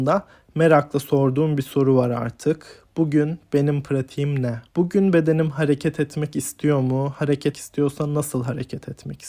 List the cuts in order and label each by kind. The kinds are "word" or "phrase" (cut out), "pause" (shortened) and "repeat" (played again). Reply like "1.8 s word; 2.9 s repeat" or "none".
4.7 s pause; 7.5 s word